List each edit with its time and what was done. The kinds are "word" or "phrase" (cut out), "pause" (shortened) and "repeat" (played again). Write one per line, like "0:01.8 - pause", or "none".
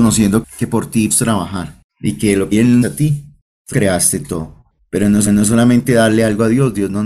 0:01.1 - word
0:01.9 - pause
0:02.5 - phrase
0:02.8 - phrase
0:03.7 - word
0:04.8 - pause
0:05.3 - repeat